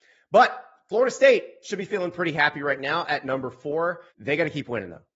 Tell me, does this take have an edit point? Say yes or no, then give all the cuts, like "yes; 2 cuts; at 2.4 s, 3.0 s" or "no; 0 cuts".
yes; 1 cut; at 4.1 s